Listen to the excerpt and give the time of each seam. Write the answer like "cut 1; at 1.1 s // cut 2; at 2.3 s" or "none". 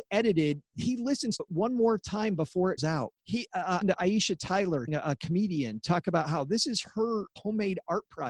cut 1; at 1.4 s // cut 2; at 2.8 s // cut 3; at 3.2 s // cut 4; at 3.8 s // cut 5; at 4.9 s // cut 6; at 7.4 s